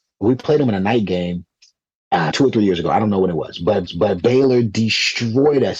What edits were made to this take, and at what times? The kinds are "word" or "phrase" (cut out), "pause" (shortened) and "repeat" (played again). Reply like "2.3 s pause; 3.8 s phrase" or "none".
2.3 s word; 3.9 s repeat